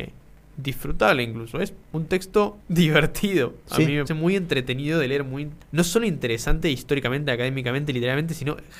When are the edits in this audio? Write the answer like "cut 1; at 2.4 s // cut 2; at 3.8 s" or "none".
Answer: cut 1; at 1.8 s // cut 2; at 2.6 s // cut 3; at 4.1 s // cut 4; at 5.6 s